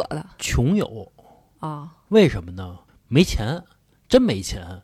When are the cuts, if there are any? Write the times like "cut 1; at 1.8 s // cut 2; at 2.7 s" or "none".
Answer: none